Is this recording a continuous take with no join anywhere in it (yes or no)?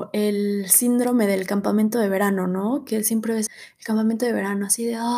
no